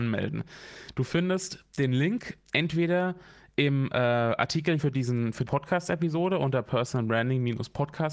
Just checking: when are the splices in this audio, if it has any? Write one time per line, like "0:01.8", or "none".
0:04.8
0:05.5